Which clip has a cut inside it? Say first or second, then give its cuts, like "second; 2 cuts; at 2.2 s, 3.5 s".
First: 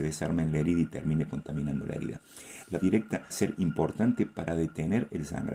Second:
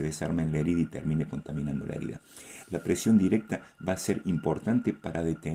first; 2 cuts; at 2.8 s, 3.3 s